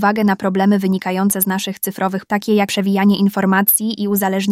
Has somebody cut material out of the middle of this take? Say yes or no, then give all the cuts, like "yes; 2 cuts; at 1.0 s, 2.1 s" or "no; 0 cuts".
yes; 2 cuts; at 2.3 s, 2.7 s